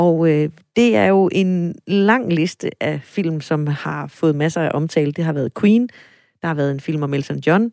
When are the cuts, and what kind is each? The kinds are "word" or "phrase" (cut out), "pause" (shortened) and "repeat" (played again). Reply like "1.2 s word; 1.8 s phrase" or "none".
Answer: none